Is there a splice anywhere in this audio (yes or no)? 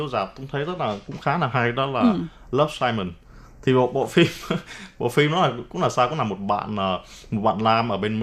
no